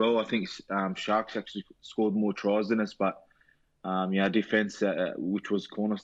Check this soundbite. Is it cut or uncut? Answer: uncut